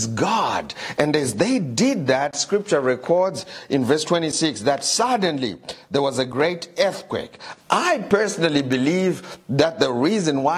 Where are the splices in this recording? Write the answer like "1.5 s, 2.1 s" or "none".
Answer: 7.6 s